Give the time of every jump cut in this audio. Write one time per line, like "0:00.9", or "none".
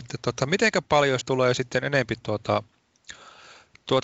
0:01.2

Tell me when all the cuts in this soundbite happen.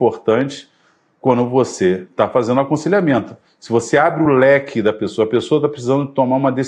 none

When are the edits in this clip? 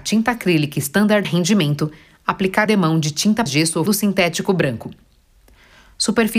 0:01.2
0:02.7
0:03.5
0:03.9

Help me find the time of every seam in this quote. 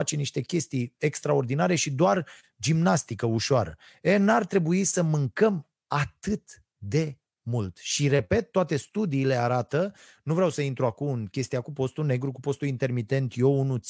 none

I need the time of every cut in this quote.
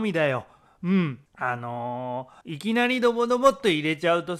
0:01.3
0:02.4

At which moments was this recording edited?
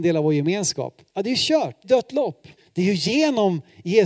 0:01.1
0:01.8
0:02.6

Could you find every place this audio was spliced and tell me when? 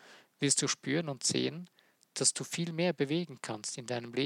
none

